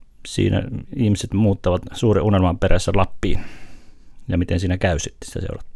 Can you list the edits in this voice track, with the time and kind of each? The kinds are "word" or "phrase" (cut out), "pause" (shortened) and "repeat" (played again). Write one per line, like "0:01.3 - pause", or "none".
none

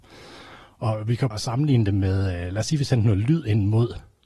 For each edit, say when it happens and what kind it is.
0:01.3 - word

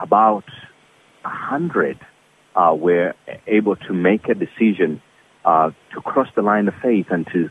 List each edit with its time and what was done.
none

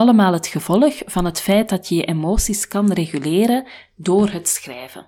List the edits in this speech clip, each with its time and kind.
none

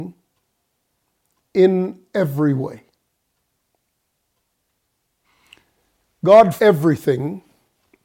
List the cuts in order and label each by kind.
0:06.6 - word

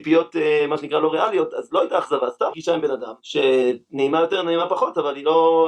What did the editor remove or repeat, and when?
0:02.5 - word
0:03.2 - pause

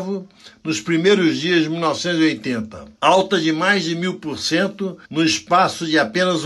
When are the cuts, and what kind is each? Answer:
0:02.9 - pause
0:05.0 - pause

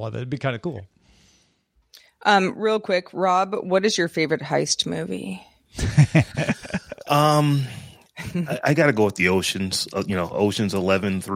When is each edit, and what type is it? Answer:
none

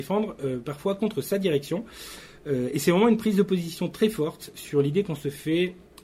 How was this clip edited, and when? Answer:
none

